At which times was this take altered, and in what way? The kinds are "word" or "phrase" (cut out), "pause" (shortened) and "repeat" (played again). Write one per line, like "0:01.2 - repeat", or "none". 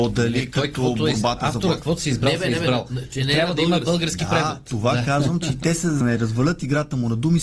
0:06.0 - word